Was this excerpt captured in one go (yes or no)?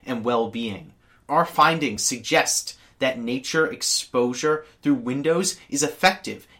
yes